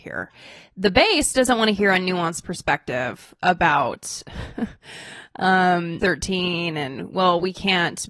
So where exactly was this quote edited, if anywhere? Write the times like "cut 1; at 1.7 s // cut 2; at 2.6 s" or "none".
cut 1; at 6.0 s